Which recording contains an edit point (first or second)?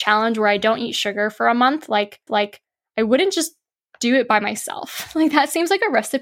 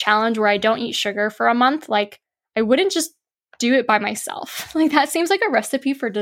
first